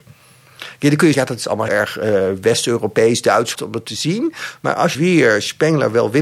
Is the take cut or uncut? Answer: cut